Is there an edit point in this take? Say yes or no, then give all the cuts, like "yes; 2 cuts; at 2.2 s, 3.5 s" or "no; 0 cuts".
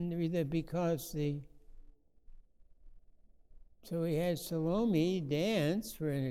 no; 0 cuts